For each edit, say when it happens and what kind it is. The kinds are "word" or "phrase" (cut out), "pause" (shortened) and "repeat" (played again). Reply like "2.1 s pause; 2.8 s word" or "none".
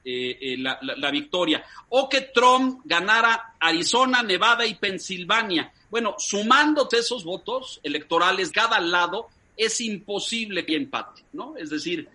6.9 s word; 8.5 s word; 10.7 s word